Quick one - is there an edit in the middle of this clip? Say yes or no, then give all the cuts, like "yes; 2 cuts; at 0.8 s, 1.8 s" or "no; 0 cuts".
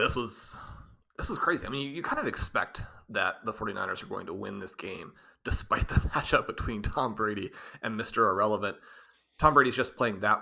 no; 0 cuts